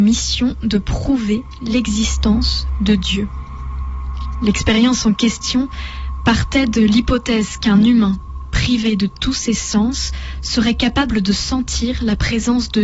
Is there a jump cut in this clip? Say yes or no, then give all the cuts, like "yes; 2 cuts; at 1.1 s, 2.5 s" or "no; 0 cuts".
no; 0 cuts